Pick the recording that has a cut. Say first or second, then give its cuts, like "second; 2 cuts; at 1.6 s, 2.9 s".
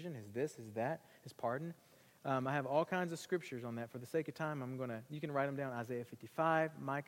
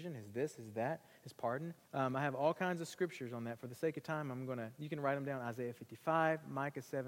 second; 1 cut; at 1.8 s